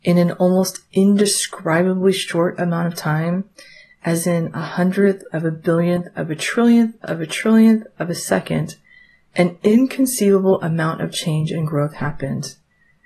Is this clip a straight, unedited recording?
yes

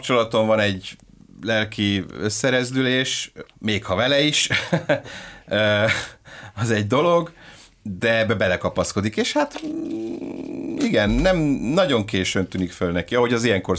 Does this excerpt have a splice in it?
no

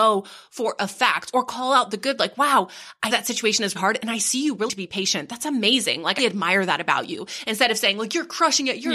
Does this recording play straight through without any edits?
no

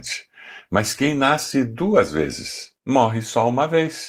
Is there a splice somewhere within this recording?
yes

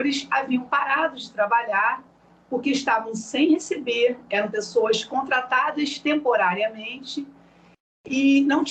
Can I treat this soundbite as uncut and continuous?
yes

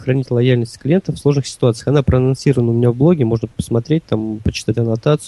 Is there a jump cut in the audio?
no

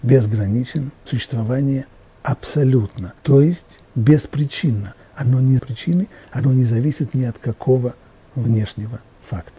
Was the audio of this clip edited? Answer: yes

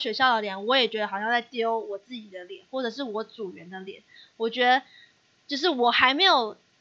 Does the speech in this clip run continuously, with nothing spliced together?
yes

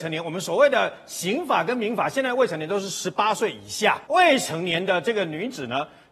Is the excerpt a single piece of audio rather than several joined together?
no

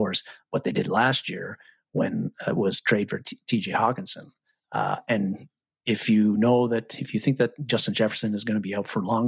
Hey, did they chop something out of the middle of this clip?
no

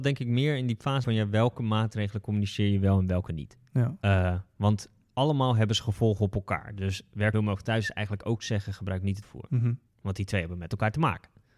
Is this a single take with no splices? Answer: no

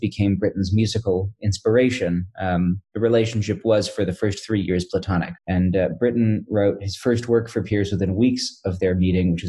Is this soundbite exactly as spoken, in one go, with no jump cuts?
no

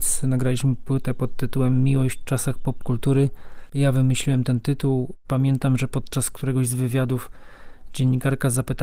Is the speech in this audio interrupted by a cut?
no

